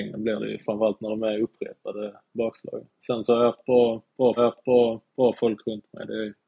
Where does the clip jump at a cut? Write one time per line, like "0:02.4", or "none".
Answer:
0:04.4

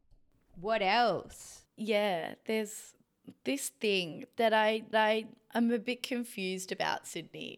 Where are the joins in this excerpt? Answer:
0:04.9

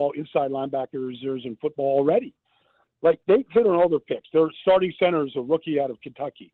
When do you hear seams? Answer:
none

